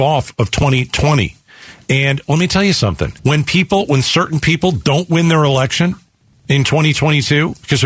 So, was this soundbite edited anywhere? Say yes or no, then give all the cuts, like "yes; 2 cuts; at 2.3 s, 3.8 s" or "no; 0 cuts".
yes; 2 cuts; at 3.2 s, 6.3 s